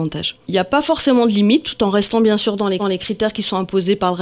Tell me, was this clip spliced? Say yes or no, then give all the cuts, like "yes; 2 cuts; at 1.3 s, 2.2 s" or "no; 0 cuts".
yes; 1 cut; at 2.8 s